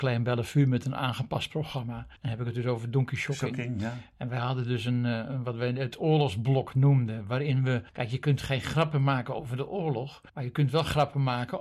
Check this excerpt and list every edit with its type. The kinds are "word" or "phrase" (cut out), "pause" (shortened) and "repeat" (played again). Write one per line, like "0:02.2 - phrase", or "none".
0:02.2 - pause
0:07.9 - pause
0:10.3 - pause